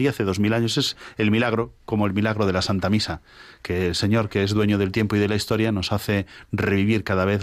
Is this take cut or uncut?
uncut